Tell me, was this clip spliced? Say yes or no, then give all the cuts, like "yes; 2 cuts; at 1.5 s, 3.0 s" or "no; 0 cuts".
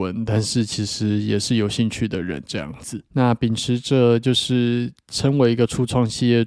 yes; 1 cut; at 3.1 s